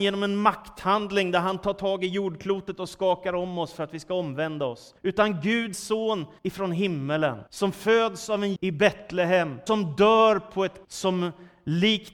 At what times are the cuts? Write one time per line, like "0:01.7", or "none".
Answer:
0:05.0
0:05.7
0:06.4
0:07.5
0:08.6
0:09.7
0:10.8

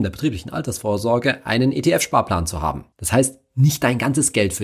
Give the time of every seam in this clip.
0:02.9

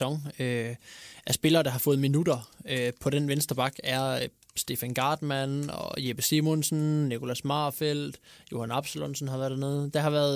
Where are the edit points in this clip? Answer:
none

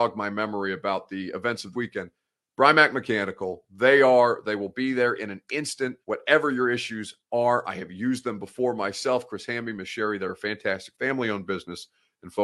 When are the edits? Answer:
0:01.7
0:06.0
0:07.2
0:10.9

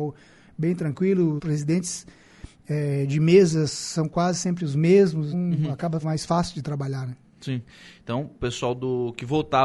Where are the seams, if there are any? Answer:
0:01.4
0:05.3
0:06.0
0:08.3

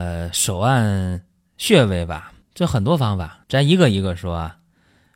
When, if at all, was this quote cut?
0:02.4
0:03.4

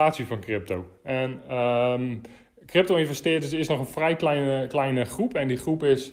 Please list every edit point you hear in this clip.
none

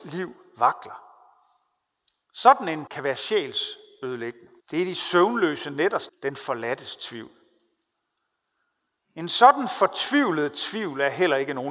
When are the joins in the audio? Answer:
0:02.9
0:04.6
0:06.1

